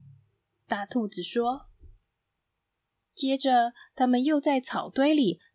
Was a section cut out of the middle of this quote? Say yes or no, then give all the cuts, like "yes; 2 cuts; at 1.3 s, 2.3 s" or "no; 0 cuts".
no; 0 cuts